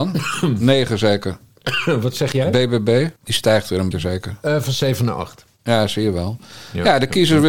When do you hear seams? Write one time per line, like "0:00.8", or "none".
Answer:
0:03.2
0:03.9